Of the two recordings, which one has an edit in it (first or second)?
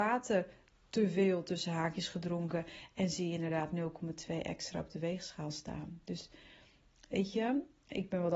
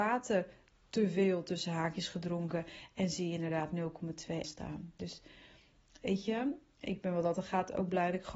second